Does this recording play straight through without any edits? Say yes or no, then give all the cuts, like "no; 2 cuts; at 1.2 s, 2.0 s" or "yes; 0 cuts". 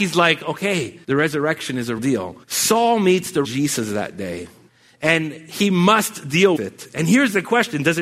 no; 6 cuts; at 1.0 s, 2.0 s, 2.4 s, 3.4 s, 4.7 s, 6.6 s